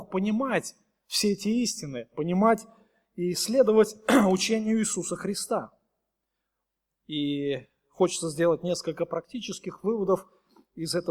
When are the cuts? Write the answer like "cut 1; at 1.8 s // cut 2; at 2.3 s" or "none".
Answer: none